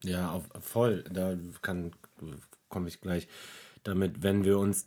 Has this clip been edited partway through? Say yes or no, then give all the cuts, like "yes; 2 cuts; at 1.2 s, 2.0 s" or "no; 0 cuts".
no; 0 cuts